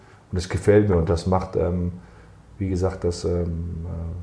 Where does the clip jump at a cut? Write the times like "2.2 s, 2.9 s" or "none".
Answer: none